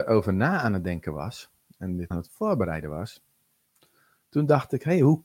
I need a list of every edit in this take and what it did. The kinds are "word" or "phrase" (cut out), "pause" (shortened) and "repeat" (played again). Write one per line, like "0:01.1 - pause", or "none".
0:02.1 - word